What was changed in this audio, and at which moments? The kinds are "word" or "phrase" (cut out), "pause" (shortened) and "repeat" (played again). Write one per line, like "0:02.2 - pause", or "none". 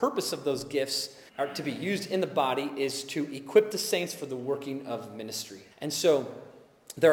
0:01.3 - pause
0:05.7 - pause